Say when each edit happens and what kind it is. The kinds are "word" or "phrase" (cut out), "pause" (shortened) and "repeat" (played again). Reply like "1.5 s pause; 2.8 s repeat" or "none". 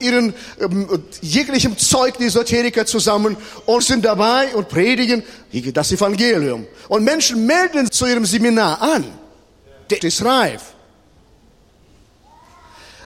3.8 s phrase; 7.9 s phrase; 10.0 s word